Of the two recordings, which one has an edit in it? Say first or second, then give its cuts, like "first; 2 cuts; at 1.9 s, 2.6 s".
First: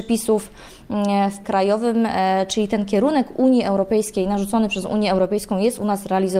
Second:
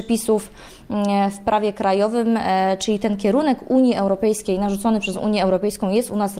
first; 1 cut; at 1.4 s